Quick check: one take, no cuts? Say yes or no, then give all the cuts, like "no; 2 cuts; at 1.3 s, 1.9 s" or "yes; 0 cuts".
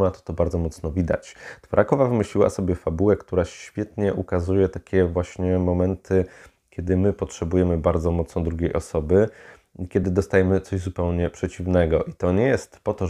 yes; 0 cuts